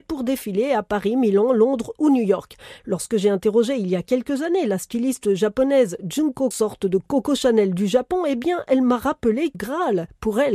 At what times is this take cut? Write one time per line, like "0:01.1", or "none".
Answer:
0:06.5
0:09.5